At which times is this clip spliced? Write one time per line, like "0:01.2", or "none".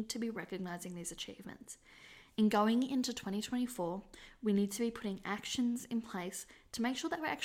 none

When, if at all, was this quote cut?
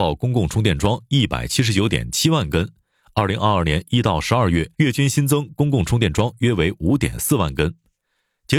0:04.7

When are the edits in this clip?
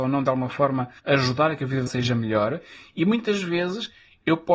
0:01.0
0:01.9

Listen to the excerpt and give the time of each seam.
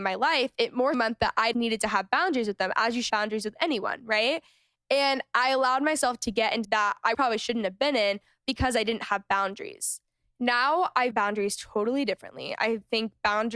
0:00.9
0:01.5
0:03.1
0:06.6
0:07.1
0:11.1

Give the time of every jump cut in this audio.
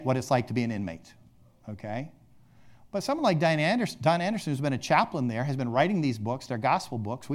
none

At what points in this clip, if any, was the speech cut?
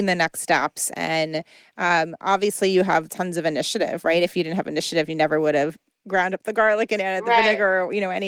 none

